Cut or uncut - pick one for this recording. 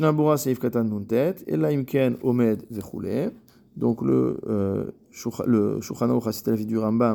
cut